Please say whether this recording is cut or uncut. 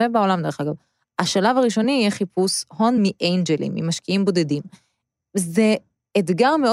uncut